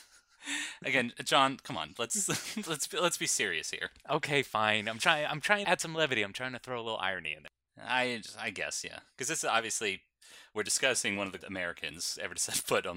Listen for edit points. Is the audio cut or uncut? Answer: cut